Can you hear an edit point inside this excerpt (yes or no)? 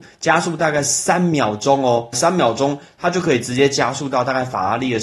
yes